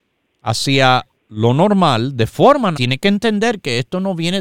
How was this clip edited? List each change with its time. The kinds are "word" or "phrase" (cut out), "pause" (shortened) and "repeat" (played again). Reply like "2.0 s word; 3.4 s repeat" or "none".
1.2 s pause; 2.7 s word